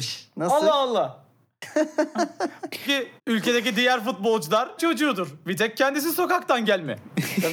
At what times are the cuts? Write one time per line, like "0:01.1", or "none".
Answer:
0:02.8
0:03.2
0:04.8